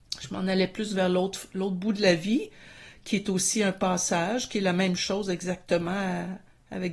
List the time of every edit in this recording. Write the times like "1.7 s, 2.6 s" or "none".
none